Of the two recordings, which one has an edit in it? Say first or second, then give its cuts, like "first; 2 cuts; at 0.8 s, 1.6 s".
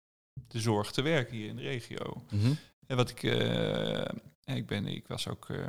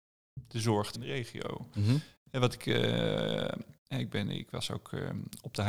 second; 1 cut; at 0.9 s